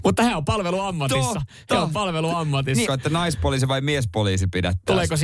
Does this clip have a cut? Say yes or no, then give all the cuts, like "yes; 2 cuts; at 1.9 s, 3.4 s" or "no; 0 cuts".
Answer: yes; 1 cut; at 2.9 s